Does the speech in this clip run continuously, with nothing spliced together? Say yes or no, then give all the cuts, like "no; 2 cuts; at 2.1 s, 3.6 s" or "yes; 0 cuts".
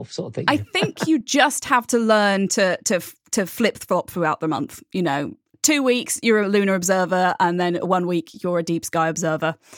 yes; 0 cuts